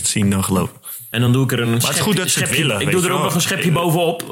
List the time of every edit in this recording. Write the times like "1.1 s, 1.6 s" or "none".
none